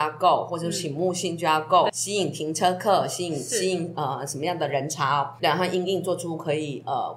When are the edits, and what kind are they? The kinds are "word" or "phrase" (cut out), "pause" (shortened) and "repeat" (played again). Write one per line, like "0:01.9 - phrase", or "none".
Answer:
0:01.9 - word
0:05.4 - word